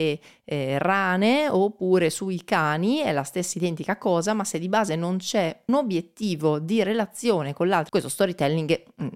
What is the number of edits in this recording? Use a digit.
2